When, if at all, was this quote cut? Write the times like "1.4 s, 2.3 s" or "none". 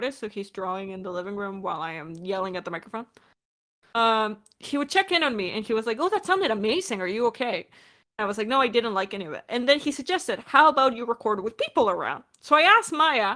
none